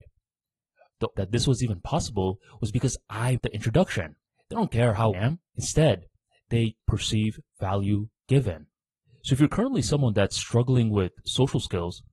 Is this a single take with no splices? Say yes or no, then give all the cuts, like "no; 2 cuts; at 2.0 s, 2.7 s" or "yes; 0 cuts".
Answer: no; 7 cuts; at 1.2 s, 3.4 s, 4.3 s, 5.1 s, 5.5 s, 6.8 s, 9.0 s